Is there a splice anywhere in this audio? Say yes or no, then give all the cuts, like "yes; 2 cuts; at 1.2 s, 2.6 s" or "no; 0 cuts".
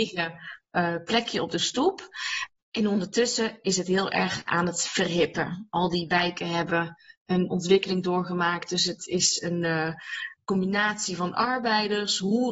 no; 0 cuts